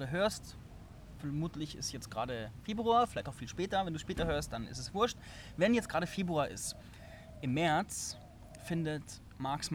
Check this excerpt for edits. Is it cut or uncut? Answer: uncut